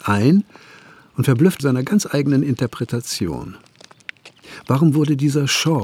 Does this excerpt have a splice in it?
yes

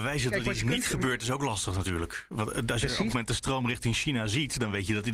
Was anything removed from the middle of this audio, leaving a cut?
yes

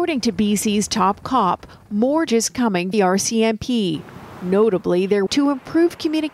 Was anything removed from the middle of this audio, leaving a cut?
yes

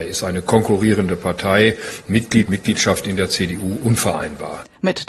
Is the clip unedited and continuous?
no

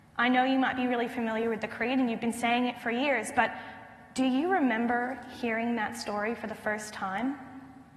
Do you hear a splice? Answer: no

